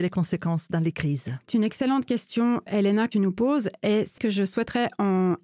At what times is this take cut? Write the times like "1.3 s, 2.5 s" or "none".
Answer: 1.5 s, 2.7 s, 3.1 s, 4.2 s